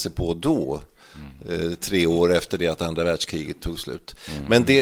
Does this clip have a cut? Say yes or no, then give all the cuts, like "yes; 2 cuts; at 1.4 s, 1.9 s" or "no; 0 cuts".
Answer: no; 0 cuts